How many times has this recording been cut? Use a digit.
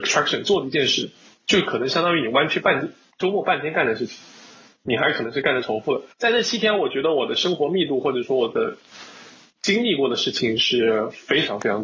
1